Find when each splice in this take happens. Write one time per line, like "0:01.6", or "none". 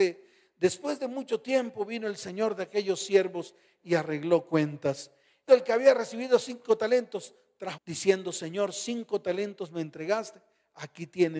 0:05.5
0:07.8